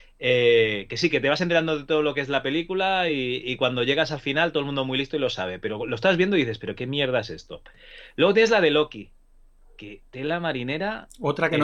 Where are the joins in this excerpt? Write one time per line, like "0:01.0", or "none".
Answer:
none